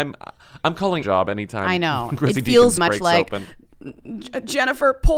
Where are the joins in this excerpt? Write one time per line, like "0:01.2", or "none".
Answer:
0:01.0
0:02.8